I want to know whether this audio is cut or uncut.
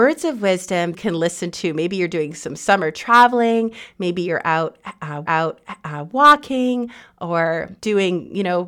cut